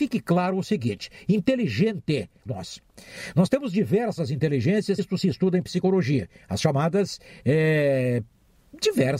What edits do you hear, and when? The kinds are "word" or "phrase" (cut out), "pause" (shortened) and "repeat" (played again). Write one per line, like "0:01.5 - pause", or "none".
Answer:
0:02.5 - phrase
0:05.0 - word